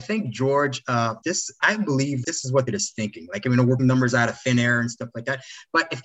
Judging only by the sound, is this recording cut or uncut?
cut